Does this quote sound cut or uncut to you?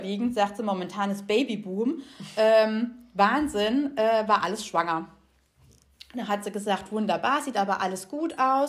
uncut